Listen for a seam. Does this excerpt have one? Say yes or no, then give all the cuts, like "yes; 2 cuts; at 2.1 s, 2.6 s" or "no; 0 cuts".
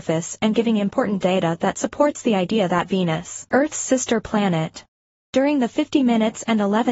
yes; 3 cuts; at 1.2 s, 3.5 s, 5.2 s